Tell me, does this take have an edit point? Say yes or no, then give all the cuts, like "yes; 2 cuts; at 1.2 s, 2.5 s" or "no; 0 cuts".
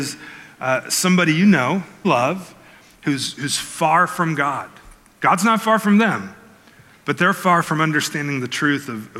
yes; 1 cut; at 2.0 s